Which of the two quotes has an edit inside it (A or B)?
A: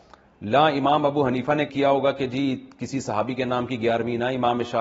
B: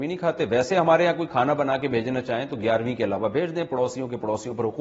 A